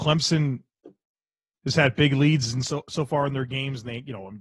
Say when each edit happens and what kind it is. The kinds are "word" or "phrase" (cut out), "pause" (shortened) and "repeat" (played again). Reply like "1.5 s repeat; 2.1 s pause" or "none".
none